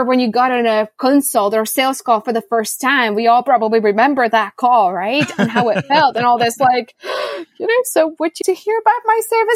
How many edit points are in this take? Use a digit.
1